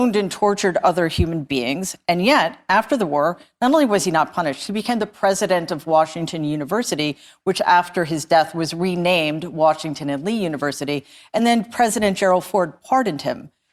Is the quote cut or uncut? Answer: uncut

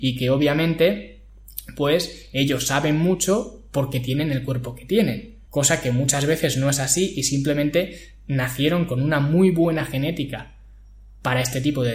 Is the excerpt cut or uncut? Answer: cut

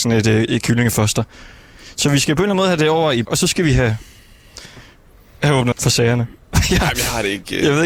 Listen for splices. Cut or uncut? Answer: cut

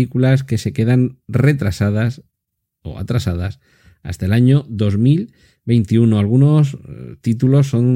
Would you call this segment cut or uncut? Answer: uncut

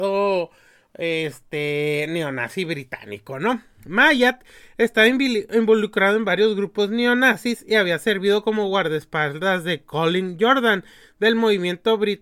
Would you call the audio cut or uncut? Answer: uncut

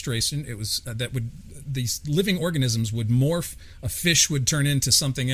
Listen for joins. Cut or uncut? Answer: uncut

